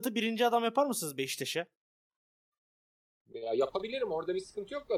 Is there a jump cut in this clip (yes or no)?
no